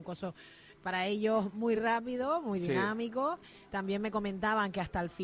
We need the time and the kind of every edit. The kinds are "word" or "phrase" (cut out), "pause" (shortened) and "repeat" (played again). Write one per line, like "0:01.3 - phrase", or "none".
none